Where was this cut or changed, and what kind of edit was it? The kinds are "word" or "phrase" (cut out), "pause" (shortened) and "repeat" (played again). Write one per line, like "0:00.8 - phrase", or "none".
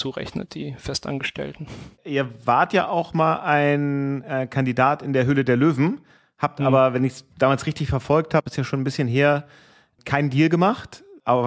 none